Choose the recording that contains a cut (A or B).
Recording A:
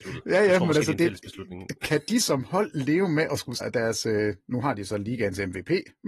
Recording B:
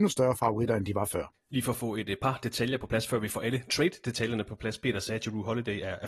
A